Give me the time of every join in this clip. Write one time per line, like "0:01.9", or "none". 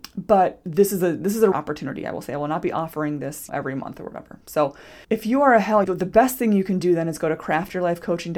0:01.5
0:03.5
0:05.0
0:05.8